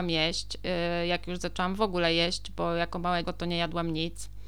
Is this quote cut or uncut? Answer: cut